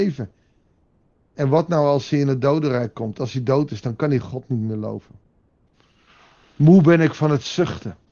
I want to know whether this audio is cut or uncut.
cut